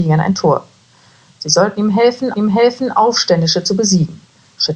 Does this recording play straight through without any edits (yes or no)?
no